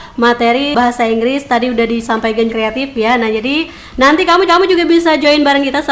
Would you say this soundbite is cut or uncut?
cut